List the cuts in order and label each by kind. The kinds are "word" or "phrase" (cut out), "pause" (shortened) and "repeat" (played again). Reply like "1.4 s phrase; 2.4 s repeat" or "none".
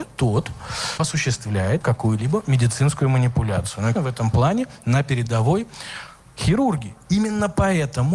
1.0 s word; 1.8 s word; 3.9 s word; 6.2 s word